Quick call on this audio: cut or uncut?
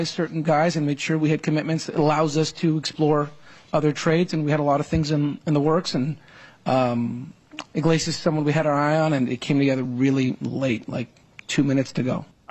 uncut